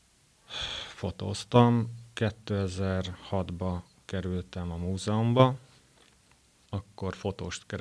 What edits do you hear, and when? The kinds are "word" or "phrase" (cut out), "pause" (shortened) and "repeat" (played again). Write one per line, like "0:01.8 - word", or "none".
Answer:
none